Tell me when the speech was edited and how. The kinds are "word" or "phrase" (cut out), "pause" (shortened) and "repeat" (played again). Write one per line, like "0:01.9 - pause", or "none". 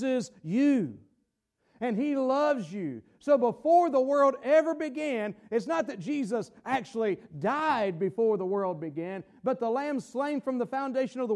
none